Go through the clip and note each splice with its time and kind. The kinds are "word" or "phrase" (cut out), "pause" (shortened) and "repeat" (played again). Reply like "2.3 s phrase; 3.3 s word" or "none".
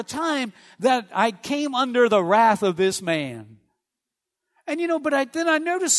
none